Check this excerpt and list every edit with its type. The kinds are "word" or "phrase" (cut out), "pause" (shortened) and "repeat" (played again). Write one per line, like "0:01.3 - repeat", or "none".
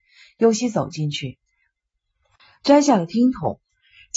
none